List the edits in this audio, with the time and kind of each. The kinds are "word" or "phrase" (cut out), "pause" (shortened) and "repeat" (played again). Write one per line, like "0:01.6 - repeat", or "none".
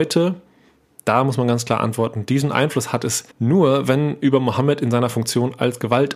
0:03.3 - pause